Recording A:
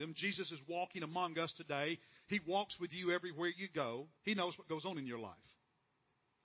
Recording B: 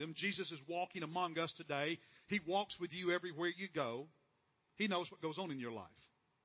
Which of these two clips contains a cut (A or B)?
A